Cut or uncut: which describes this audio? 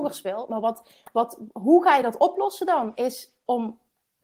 uncut